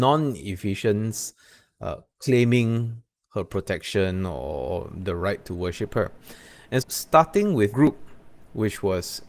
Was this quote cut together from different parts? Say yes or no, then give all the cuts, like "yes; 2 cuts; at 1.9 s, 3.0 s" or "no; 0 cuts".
yes; 2 cuts; at 6.8 s, 7.7 s